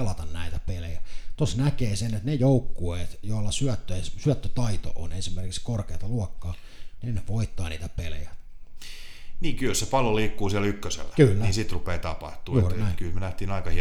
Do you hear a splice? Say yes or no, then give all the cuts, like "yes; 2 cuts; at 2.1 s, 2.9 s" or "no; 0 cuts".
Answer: no; 0 cuts